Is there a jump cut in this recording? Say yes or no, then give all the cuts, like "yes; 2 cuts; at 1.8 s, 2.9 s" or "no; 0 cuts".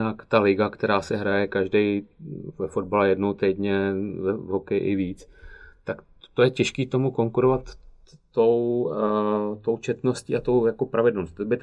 no; 0 cuts